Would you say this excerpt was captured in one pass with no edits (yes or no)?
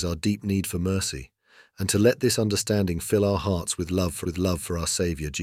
no